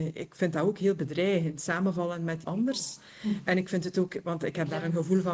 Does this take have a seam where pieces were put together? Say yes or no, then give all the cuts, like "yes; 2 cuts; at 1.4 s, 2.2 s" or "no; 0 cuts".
yes; 1 cut; at 2.4 s